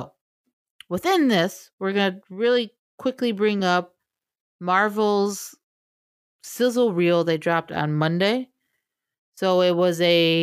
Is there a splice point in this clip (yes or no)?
no